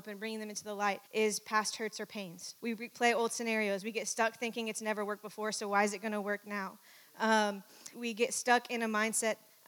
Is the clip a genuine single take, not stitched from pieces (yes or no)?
no